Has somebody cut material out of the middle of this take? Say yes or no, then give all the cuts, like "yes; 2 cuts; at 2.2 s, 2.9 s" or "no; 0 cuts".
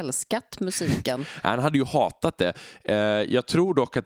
no; 0 cuts